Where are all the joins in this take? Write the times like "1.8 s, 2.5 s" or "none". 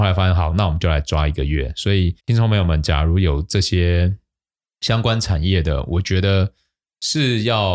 2.2 s